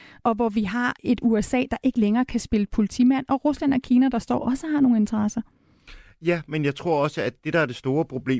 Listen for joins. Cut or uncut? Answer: uncut